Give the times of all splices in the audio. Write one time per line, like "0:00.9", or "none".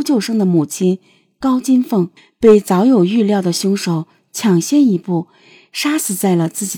0:02.2